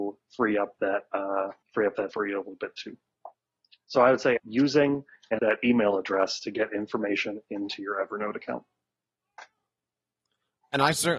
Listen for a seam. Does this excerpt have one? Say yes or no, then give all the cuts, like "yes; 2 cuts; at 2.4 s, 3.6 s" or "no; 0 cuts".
yes; 4 cuts; at 1.6 s, 2.1 s, 4.4 s, 5.4 s